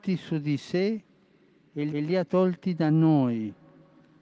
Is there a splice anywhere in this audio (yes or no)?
yes